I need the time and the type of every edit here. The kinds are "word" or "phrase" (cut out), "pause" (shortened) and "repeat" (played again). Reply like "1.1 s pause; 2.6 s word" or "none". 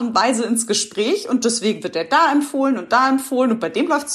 none

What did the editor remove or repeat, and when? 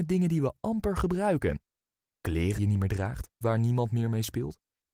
2.6 s word; 3.4 s word

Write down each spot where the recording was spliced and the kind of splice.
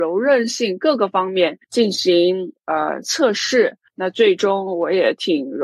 1.6 s pause; 3.9 s pause

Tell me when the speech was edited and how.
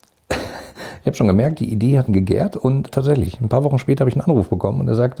2.1 s word; 2.9 s word

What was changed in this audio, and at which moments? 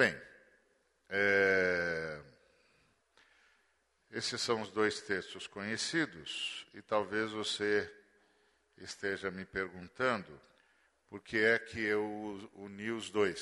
10.6 s pause

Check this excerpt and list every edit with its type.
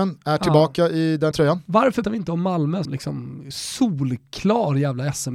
1.3 s word; 2.0 s word; 2.8 s word

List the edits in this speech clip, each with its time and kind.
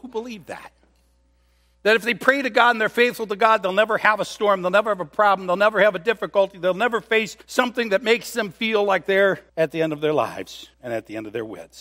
7.4 s pause; 9.5 s pause; 10.7 s pause

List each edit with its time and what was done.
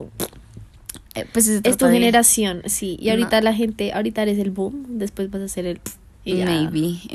6.1 s pause

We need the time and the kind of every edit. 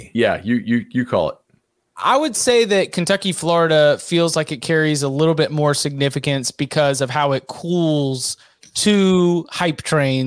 none

